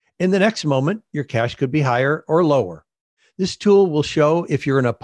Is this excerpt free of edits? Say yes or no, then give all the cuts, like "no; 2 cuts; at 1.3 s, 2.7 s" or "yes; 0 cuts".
yes; 0 cuts